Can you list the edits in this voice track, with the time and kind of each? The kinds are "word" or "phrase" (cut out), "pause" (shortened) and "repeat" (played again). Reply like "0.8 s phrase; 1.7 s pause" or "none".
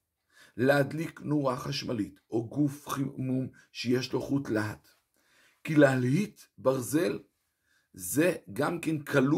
none